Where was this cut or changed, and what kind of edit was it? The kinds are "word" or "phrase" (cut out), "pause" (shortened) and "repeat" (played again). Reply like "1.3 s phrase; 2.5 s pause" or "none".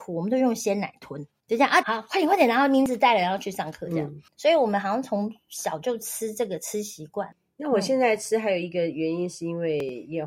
1.8 s phrase; 4.3 s pause